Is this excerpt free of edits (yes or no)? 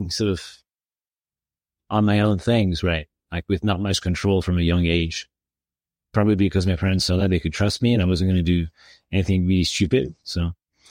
yes